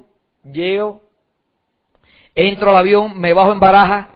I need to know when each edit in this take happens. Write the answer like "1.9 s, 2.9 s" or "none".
none